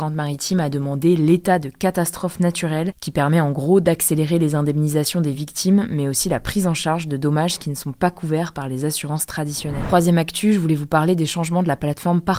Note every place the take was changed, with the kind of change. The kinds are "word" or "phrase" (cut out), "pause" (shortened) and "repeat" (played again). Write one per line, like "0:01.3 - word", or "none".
none